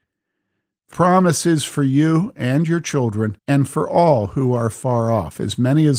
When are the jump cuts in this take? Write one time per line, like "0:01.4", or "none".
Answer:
0:00.9
0:03.4